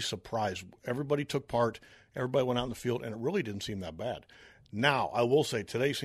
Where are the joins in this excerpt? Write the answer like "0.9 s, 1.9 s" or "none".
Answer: none